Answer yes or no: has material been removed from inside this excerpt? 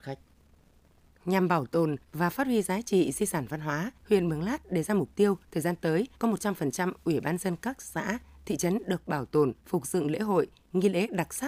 yes